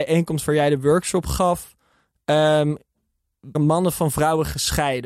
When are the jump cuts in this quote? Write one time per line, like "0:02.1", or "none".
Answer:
0:03.5